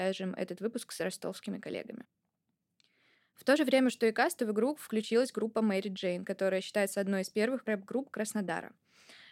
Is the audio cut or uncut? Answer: uncut